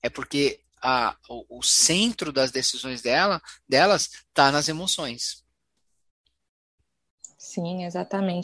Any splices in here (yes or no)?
no